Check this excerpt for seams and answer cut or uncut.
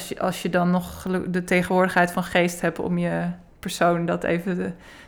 uncut